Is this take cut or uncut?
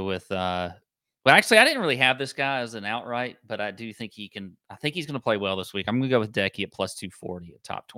uncut